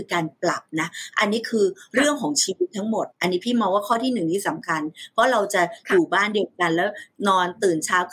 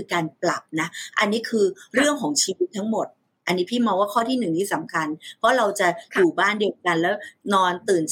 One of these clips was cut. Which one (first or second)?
first